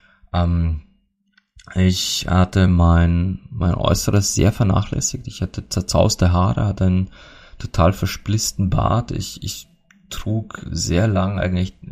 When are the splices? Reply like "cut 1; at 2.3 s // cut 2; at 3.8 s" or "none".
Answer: none